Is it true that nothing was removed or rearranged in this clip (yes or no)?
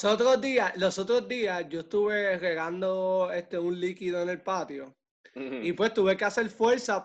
yes